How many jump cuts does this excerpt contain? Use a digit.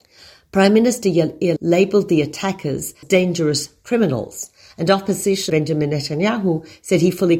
3